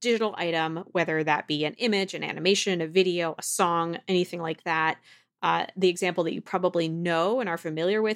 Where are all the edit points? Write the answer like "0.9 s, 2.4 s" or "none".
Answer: none